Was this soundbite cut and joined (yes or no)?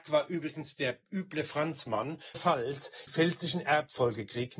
yes